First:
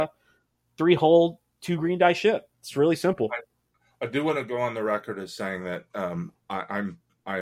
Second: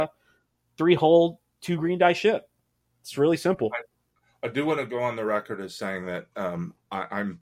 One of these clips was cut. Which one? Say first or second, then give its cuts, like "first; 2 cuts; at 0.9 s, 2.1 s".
first; 1 cut; at 2.5 s